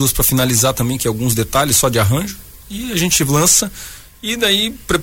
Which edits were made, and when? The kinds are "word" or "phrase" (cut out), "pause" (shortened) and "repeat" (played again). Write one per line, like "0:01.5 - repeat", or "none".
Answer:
none